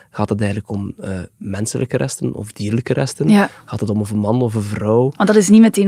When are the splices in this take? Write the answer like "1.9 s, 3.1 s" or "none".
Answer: none